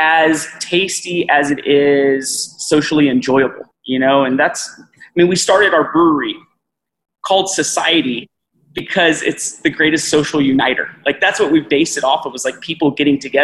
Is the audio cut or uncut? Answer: cut